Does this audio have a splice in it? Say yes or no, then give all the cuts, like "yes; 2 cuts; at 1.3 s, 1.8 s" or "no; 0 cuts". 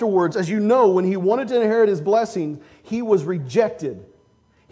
no; 0 cuts